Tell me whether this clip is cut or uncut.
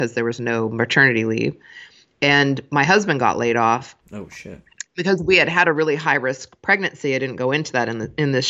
cut